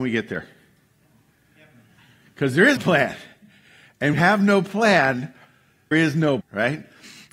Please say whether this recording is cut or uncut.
cut